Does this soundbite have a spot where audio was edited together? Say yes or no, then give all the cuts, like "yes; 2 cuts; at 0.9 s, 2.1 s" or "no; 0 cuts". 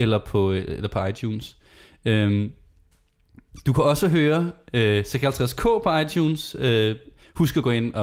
no; 0 cuts